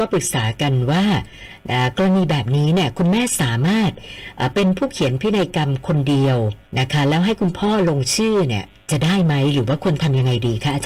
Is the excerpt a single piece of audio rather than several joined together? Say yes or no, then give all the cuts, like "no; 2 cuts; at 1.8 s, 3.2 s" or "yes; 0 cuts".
no; 1 cut; at 6.7 s